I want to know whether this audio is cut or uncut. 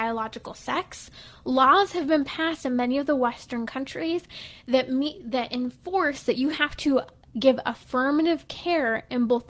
uncut